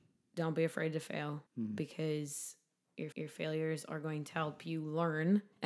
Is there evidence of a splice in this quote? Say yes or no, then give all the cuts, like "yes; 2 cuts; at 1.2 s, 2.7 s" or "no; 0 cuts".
yes; 2 cuts; at 1.5 s, 3.1 s